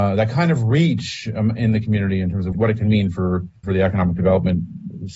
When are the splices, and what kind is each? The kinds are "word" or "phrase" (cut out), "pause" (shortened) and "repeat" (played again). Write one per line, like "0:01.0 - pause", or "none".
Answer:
0:03.6 - pause

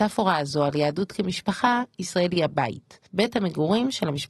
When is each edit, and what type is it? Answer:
0:03.1 - pause

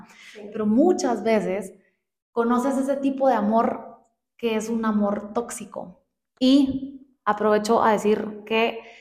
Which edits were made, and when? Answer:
none

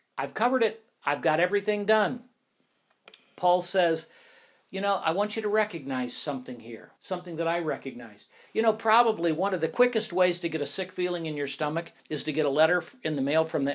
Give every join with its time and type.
0:07.0 - pause
0:12.0 - pause

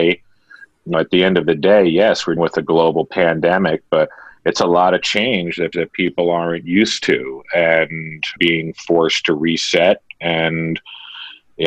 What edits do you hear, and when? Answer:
0:00.9 - word
0:02.4 - word
0:05.7 - repeat
0:08.4 - word

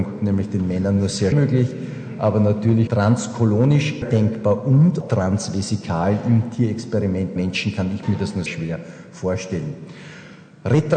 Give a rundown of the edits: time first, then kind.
0:01.3 - word
0:02.9 - word
0:04.0 - word
0:05.0 - word
0:07.4 - word
0:08.0 - word
0:08.5 - word

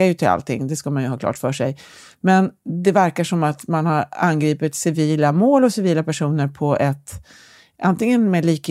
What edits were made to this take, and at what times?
none

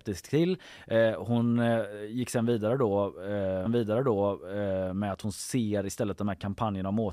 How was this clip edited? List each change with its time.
0:03.7 - repeat

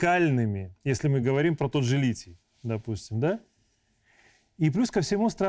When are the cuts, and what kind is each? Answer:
none

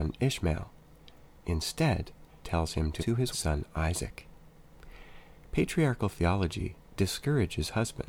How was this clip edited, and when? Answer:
0:02.4 - word
0:03.0 - word
0:03.3 - phrase

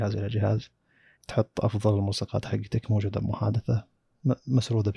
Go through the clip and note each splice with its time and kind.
0:01.2 - word

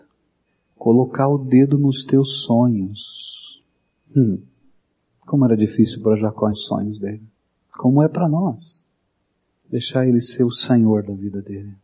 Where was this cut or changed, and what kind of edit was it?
0:06.5 - word
0:07.4 - pause

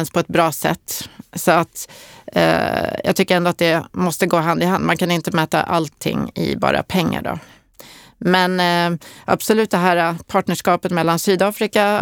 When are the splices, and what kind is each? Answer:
none

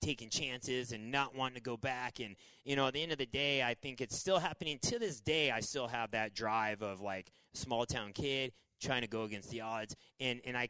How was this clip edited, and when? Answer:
none

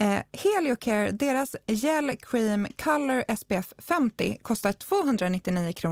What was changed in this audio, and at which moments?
none

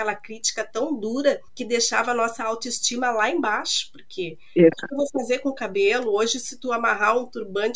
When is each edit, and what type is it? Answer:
0:01.5 - pause
0:04.7 - word

